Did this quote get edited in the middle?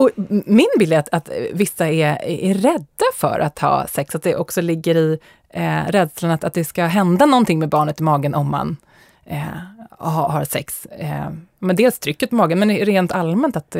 no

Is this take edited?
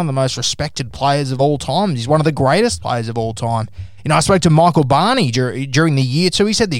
no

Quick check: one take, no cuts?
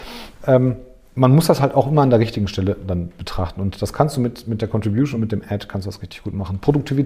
yes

